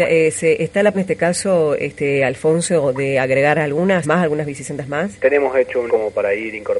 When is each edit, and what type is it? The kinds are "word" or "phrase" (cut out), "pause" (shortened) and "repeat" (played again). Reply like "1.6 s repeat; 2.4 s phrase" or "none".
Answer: 0.9 s word; 4.0 s word; 5.9 s word